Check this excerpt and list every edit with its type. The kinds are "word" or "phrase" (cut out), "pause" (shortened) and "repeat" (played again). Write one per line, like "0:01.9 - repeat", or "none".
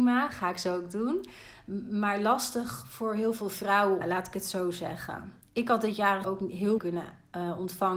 0:04.0 - phrase
0:06.2 - word
0:06.8 - word